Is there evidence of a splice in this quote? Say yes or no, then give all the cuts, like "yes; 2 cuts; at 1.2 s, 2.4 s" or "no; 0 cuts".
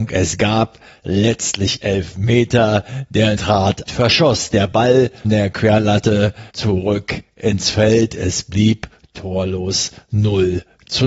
yes; 4 cuts; at 3.4 s, 3.9 s, 5.2 s, 6.5 s